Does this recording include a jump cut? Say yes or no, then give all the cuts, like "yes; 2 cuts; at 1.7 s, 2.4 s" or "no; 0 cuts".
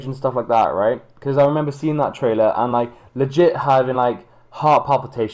no; 0 cuts